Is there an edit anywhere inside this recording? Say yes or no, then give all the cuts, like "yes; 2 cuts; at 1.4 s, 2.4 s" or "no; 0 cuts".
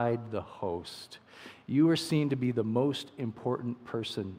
no; 0 cuts